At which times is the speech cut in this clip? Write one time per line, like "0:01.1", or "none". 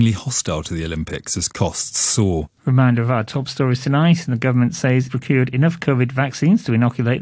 0:02.6
0:05.1